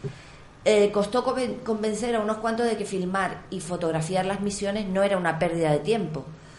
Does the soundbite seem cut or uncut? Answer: uncut